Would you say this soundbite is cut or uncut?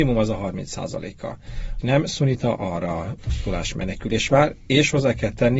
cut